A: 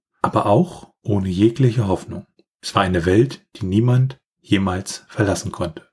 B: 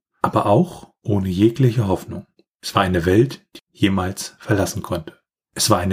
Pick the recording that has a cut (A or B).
B